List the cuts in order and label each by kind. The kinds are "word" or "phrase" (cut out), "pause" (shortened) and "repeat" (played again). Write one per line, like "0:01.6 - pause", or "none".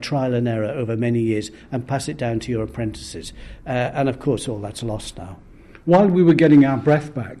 none